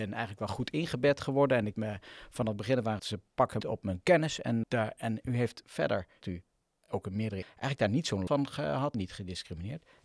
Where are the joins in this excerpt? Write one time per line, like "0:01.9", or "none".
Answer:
0:01.7
0:03.0
0:03.6
0:04.6
0:06.2
0:07.4
0:08.3
0:08.9